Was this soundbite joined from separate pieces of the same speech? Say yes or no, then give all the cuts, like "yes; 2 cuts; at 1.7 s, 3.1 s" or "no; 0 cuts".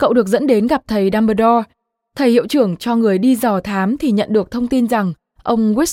no; 0 cuts